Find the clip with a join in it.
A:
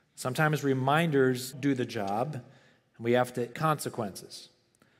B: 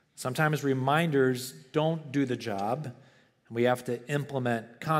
A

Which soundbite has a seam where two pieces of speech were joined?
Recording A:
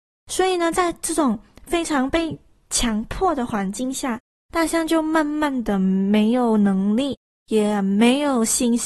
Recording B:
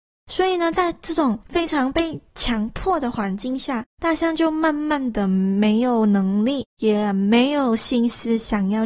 B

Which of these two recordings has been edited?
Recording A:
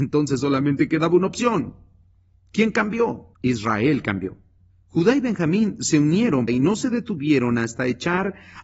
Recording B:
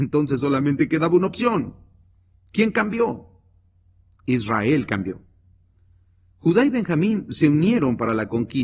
A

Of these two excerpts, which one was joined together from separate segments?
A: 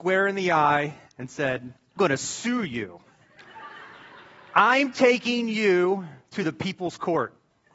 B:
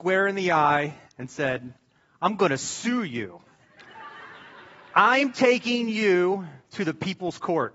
A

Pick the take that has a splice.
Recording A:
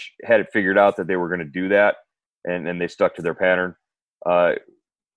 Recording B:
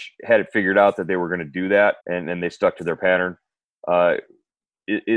B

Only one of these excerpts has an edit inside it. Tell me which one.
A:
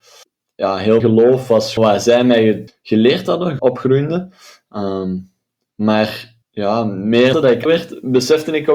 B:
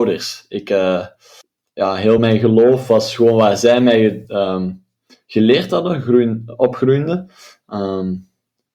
A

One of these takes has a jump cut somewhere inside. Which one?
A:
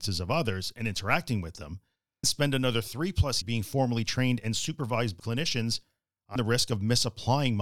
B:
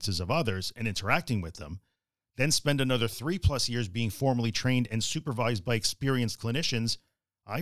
A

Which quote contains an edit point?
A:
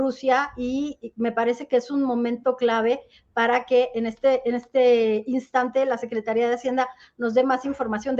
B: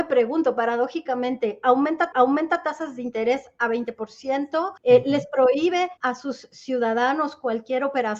B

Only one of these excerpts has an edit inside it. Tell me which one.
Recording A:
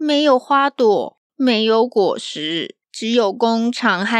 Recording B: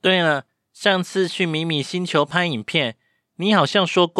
A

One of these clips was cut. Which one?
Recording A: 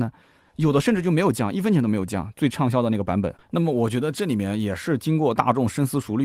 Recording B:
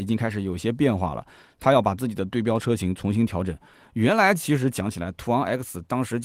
A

